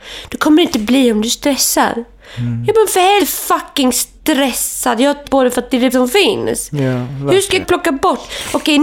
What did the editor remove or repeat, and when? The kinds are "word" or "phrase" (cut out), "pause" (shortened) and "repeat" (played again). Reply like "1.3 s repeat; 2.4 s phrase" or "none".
3.2 s word; 5.2 s word; 5.9 s word; 7.6 s word